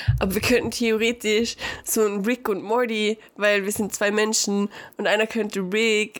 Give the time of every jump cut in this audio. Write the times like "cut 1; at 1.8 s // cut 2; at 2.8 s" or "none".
none

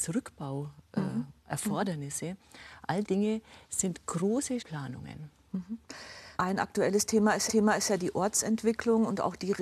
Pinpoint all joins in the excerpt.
cut 1; at 3.0 s // cut 2; at 3.6 s // cut 3; at 4.6 s // cut 4; at 6.3 s // cut 5; at 7.5 s

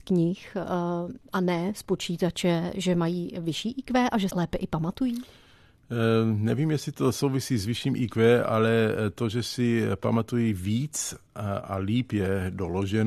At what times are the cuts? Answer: cut 1; at 4.3 s

